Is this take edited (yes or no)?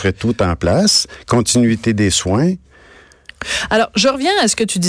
no